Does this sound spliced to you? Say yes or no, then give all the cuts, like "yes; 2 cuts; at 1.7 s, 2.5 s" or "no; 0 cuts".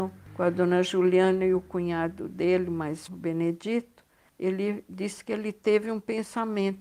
yes; 1 cut; at 3.1 s